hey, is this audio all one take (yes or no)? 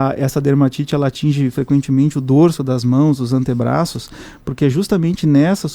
yes